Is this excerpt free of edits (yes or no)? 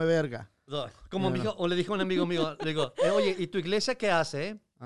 yes